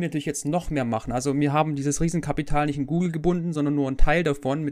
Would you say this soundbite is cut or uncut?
uncut